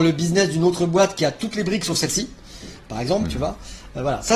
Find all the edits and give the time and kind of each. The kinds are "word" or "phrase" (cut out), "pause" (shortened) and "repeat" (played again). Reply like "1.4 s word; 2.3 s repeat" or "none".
none

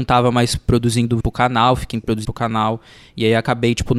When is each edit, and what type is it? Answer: 1.2 s word; 1.9 s word; 2.2 s word

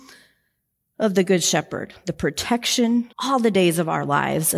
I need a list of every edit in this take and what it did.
3.1 s pause

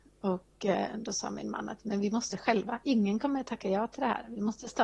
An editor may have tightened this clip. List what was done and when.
2.3 s word

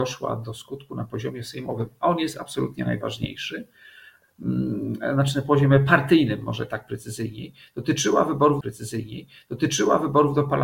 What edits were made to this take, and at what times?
8.6 s repeat

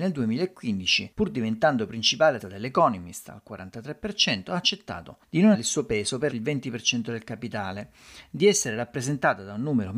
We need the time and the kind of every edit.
1.1 s pause; 2.4 s word; 5.2 s pause; 5.5 s word; 6.3 s word

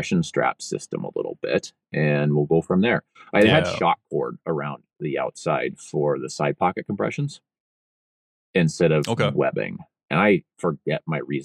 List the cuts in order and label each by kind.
none

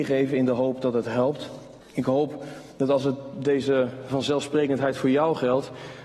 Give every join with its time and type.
1.8 s pause; 2.7 s pause

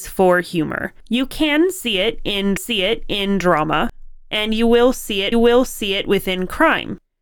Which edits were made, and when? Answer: 1.0 s pause; 2.6 s repeat; 5.3 s repeat

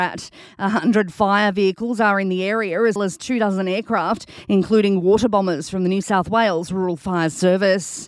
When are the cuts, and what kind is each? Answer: 3.0 s word

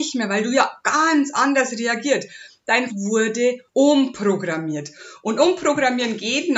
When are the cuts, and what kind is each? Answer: 2.9 s word; 3.7 s pause

